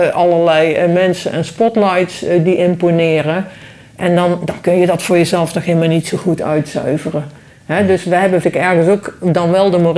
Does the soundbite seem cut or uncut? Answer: cut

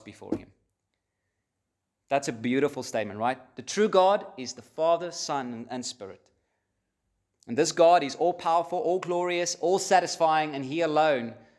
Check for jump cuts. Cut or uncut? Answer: uncut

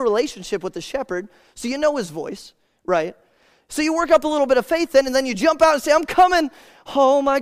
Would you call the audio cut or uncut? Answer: uncut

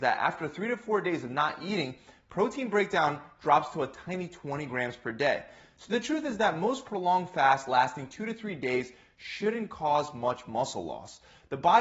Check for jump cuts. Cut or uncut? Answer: uncut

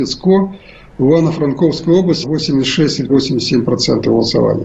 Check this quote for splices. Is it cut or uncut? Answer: cut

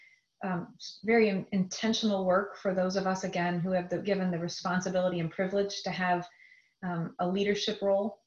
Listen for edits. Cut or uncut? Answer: uncut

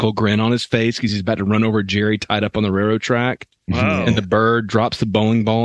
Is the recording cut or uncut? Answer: uncut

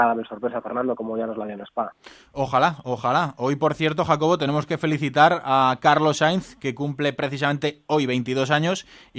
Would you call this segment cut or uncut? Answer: uncut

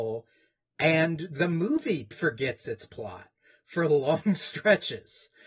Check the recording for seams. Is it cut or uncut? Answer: uncut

